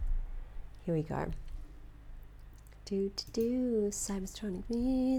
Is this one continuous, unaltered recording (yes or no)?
yes